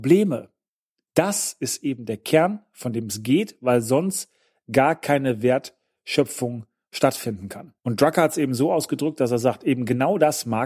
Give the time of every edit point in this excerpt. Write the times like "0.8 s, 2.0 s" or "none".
none